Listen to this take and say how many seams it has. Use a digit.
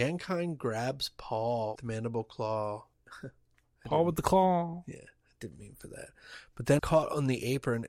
3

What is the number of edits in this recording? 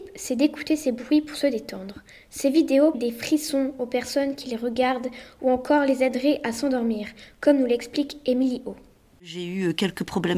1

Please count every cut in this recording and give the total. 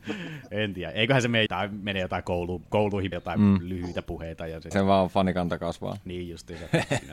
3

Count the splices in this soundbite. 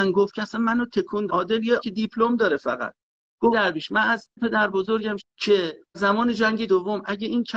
7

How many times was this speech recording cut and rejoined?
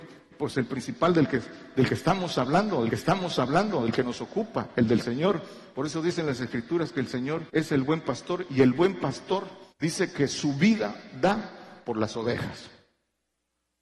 3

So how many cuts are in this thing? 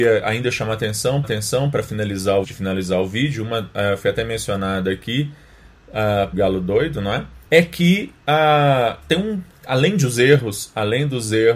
4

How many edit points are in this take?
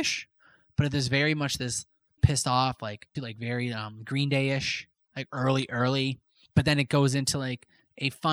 2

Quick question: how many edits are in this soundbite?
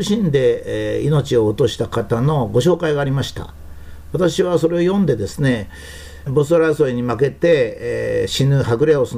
1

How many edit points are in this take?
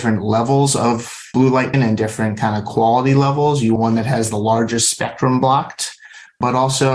2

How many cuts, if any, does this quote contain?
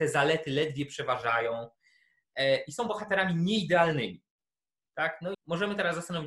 1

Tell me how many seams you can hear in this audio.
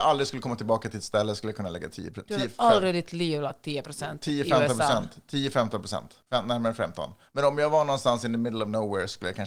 1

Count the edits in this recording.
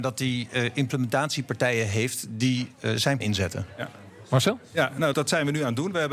2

